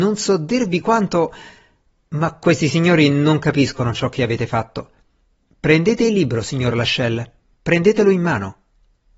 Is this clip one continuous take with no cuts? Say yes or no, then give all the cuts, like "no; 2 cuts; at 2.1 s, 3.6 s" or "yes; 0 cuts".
yes; 0 cuts